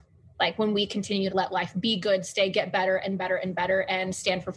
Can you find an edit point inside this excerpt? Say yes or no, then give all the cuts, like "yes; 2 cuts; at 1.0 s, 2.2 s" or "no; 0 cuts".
yes; 2 cuts; at 1.3 s, 2.5 s